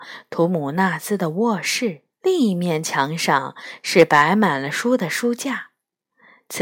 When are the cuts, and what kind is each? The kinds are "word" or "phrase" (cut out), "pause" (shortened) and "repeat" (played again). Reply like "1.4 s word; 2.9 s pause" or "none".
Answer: 2.1 s pause

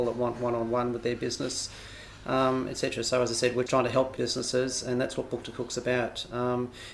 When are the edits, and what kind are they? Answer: 3.7 s word; 4.2 s phrase

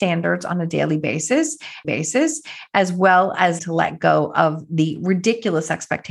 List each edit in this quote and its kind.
1.8 s repeat; 3.6 s word

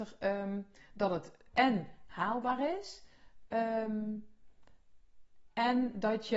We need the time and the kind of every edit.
none

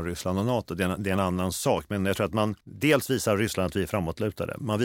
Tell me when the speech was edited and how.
2.6 s pause

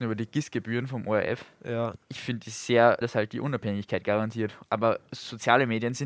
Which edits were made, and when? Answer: 2.0 s pause; 3.0 s phrase

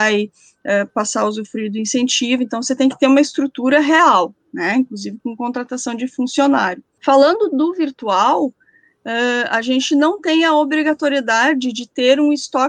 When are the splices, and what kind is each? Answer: none

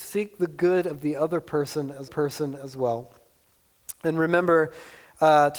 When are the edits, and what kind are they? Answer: 2.1 s repeat

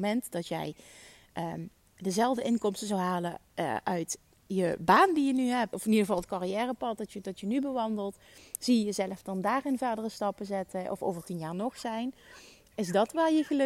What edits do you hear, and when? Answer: 5.7 s word

